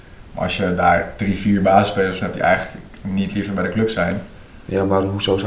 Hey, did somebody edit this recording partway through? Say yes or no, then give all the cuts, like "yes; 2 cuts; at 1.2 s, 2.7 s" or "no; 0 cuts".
no; 0 cuts